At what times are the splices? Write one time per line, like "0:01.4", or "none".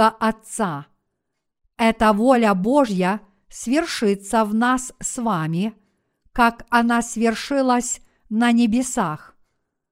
none

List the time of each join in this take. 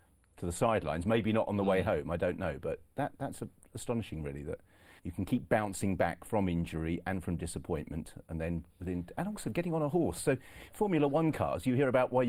0:02.9
0:05.0
0:08.7

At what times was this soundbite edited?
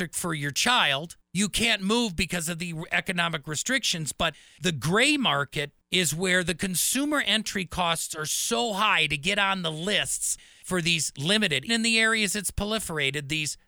0:11.7

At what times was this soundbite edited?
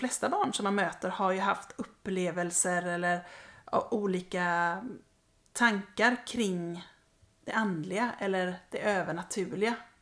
none

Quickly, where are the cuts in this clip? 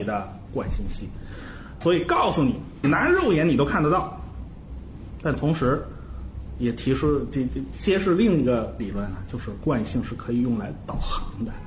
0:01.8
0:02.8

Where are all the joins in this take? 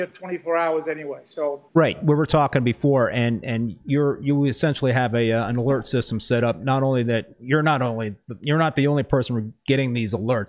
0:01.7

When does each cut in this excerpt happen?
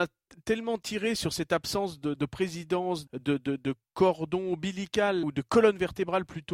0:02.1
0:03.1
0:05.2

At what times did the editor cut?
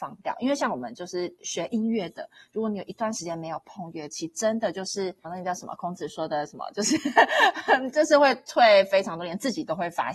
0:05.2

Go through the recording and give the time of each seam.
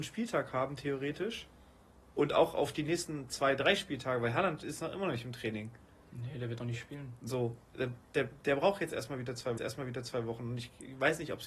0:09.6

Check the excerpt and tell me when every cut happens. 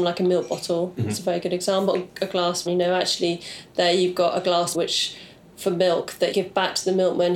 0:02.7
0:04.7
0:06.3

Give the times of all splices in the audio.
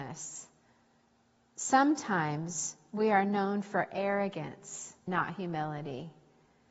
0:05.1

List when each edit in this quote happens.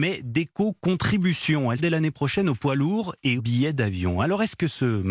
0:01.8
0:03.4

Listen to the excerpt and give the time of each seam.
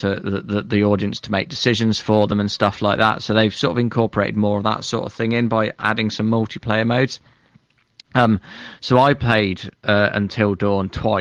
none

